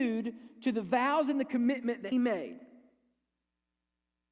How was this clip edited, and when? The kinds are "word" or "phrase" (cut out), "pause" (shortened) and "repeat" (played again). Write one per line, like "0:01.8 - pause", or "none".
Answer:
0:02.1 - word